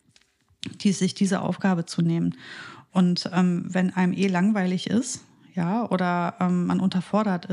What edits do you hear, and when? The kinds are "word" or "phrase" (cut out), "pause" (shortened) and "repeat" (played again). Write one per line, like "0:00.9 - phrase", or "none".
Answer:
none